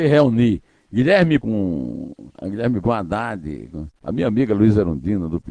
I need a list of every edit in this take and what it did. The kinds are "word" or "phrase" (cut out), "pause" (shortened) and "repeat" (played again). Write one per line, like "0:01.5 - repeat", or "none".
0:01.4 - word
0:02.3 - pause
0:02.8 - word
0:04.0 - pause